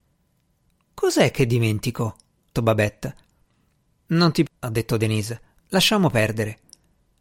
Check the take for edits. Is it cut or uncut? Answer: cut